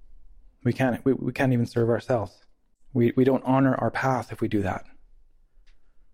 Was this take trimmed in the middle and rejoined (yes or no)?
yes